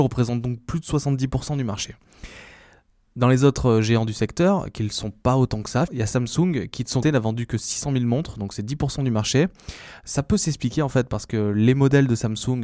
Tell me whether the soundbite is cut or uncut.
cut